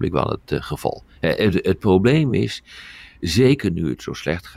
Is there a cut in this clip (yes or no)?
no